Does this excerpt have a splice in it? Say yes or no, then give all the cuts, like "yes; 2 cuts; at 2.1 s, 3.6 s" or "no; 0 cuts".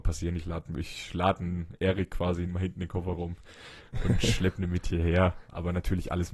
yes; 1 cut; at 2.5 s